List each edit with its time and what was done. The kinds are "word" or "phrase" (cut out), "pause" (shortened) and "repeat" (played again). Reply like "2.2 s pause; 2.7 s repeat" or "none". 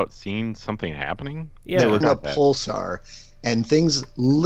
1.6 s pause; 2.0 s word